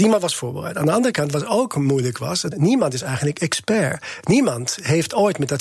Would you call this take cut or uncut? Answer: cut